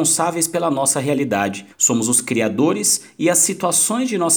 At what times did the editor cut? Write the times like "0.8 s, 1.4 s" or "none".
1.7 s